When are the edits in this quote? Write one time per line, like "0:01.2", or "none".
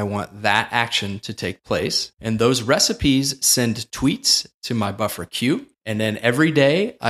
0:02.1
0:05.7